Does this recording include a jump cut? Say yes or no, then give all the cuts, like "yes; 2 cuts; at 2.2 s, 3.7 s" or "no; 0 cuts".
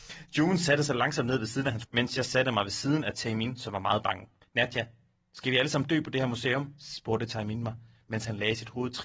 yes; 2 cuts; at 1.8 s, 4.4 s